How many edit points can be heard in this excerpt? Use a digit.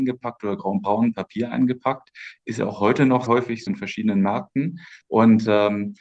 3